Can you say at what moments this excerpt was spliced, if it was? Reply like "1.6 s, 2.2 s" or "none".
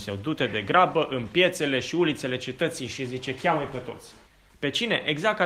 4.3 s